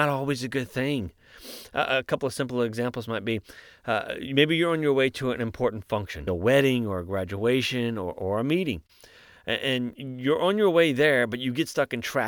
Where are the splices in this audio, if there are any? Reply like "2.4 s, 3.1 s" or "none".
6.3 s